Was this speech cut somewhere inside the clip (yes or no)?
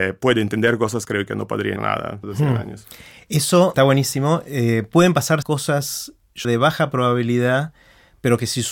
yes